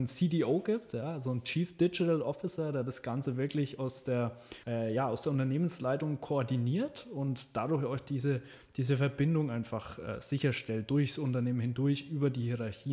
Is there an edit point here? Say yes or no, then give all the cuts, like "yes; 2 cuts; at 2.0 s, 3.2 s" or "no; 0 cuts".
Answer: yes; 1 cut; at 4.6 s